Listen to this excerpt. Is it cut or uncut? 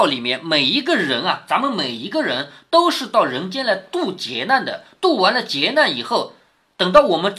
uncut